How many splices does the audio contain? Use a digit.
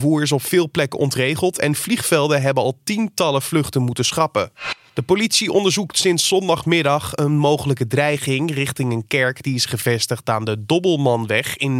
0